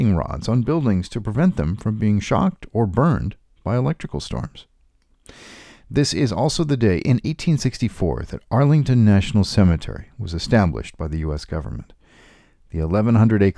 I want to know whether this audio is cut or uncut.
uncut